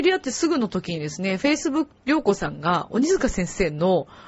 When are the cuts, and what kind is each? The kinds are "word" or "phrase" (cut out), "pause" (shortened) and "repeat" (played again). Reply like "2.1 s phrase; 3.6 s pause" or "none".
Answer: 1.9 s word

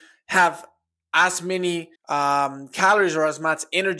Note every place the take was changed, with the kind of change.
2.0 s pause

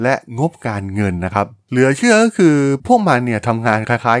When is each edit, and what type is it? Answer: 1.6 s pause

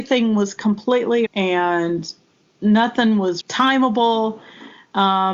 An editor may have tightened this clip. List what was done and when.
1.3 s word; 3.4 s word

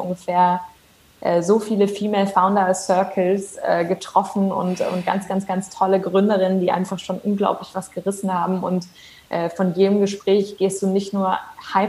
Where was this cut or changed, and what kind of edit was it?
none

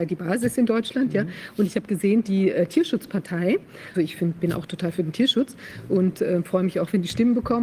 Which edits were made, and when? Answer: 3.9 s word

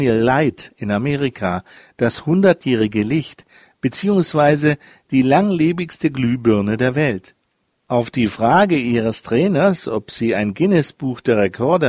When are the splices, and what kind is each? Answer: none

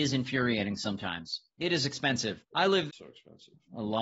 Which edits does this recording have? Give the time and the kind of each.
2.9 s word

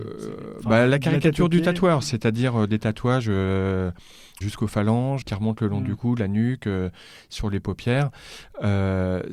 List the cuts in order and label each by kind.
4.4 s word; 5.2 s word

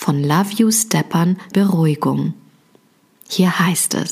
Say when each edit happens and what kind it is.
1.5 s word

